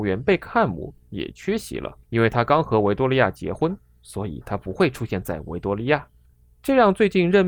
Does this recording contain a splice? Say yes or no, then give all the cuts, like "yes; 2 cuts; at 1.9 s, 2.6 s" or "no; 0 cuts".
yes; 2 cuts; at 2.0 s, 6.2 s